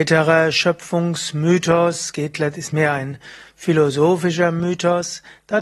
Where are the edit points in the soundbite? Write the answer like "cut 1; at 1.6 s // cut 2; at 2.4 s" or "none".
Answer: none